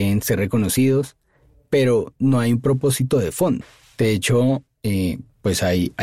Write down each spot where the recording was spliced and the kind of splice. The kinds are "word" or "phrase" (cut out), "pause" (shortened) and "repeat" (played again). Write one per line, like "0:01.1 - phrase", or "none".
none